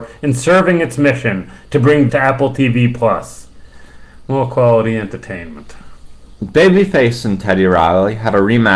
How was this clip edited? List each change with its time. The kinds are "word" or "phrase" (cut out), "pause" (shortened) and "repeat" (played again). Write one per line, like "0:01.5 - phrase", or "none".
0:02.1 - word